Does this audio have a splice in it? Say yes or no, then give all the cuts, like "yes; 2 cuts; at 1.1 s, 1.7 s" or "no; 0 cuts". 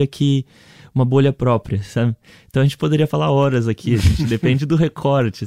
no; 0 cuts